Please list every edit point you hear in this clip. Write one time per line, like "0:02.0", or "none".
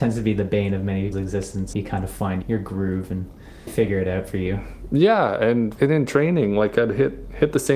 0:01.1
0:01.7
0:02.4
0:03.7
0:05.8